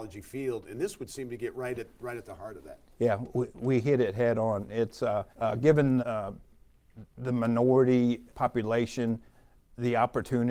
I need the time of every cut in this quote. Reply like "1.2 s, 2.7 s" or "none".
5.3 s, 6.0 s, 8.3 s